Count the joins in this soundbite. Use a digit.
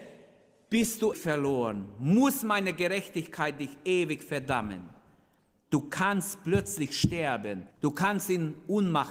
2